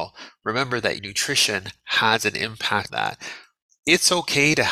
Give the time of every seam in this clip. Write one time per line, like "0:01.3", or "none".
0:01.0
0:02.9